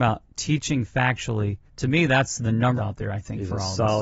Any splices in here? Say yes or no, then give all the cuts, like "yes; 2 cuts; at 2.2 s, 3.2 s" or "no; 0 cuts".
yes; 2 cuts; at 1.7 s, 2.8 s